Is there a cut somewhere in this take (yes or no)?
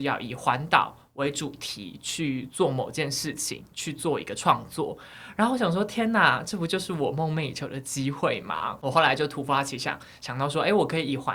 no